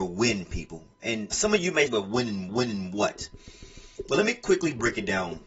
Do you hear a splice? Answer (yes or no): yes